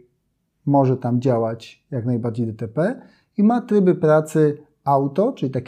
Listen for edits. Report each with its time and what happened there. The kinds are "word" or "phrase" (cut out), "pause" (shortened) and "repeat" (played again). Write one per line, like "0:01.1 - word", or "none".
none